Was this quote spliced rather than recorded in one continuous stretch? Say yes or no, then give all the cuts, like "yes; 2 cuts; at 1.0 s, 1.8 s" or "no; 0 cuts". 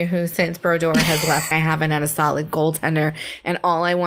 yes; 1 cut; at 1.5 s